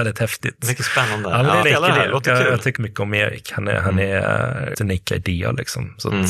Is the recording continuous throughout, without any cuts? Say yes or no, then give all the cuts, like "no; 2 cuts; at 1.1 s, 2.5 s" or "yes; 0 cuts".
no; 3 cuts; at 1.6 s, 2.8 s, 4.7 s